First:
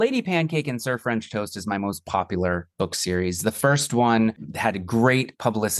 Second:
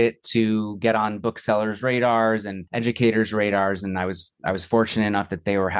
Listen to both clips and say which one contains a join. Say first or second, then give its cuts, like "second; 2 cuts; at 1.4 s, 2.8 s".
second; 1 cut; at 2.7 s